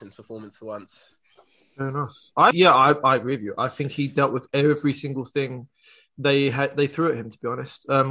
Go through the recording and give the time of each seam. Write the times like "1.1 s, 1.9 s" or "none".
2.5 s

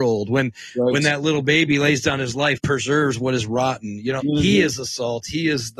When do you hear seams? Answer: 2.6 s, 4.2 s

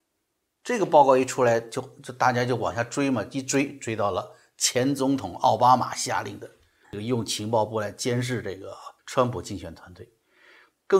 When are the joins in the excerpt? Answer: 6.8 s, 9.0 s

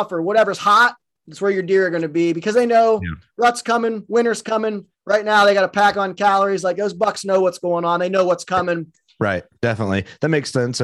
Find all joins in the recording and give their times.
none

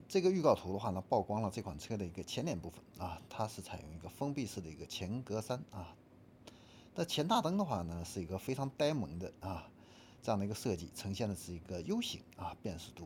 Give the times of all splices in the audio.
none

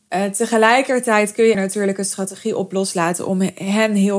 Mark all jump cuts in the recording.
1.5 s

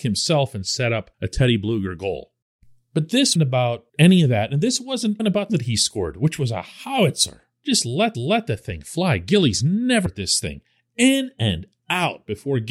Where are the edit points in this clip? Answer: 1.1 s, 2.6 s, 3.4 s, 3.9 s, 5.2 s, 5.5 s, 8.1 s, 10.1 s

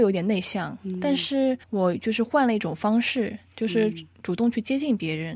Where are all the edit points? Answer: 1.6 s

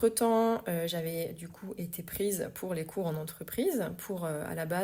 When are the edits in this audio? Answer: none

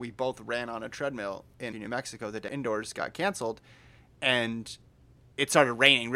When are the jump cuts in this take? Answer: 1.7 s, 2.5 s

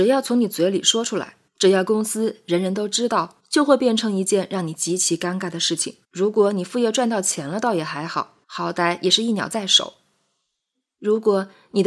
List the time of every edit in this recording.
1.5 s, 3.4 s, 6.0 s, 8.4 s

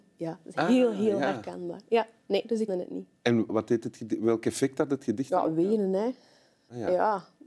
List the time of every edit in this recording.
2.7 s, 3.5 s

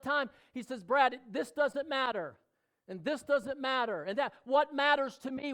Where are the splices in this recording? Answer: none

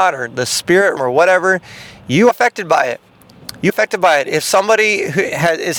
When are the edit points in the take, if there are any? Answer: 1.0 s, 2.3 s, 3.7 s

